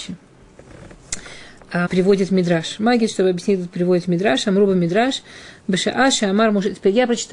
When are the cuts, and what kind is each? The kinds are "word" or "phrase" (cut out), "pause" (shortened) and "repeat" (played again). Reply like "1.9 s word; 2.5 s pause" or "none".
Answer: 1.9 s word; 3.7 s word

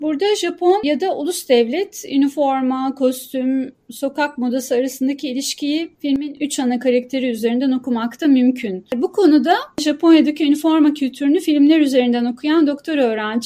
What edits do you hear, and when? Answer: 6.0 s pause

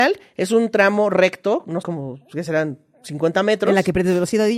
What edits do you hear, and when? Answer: 1.8 s word

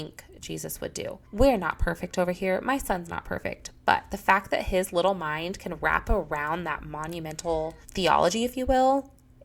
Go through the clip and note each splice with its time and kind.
1.2 s pause; 7.8 s pause

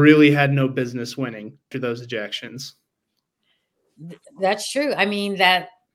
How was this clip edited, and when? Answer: 1.7 s word

